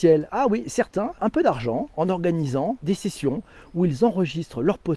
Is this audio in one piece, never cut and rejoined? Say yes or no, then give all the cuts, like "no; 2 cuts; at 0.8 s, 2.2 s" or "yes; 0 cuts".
no; 2 cuts; at 1.2 s, 2.8 s